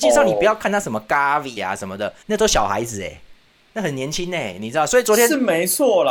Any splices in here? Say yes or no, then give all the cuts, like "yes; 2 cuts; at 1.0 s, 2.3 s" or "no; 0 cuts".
yes; 2 cuts; at 1.6 s, 2.2 s